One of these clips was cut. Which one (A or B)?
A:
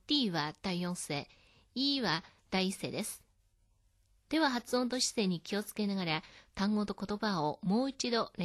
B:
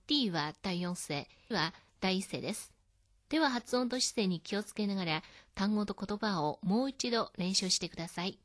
B